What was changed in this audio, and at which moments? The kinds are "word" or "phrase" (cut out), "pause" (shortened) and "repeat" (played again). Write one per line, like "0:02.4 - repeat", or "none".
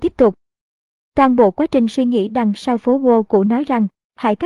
none